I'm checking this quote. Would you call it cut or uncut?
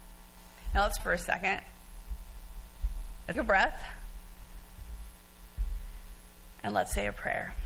cut